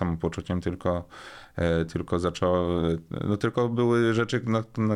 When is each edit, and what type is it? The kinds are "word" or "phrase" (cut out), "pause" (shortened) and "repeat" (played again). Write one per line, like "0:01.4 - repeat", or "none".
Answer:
none